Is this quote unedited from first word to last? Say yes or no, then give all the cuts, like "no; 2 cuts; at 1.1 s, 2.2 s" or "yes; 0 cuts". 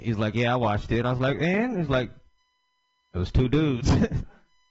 yes; 0 cuts